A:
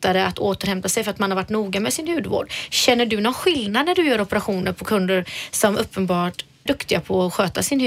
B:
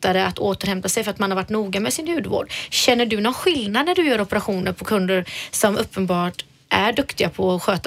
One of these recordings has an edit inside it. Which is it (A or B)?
A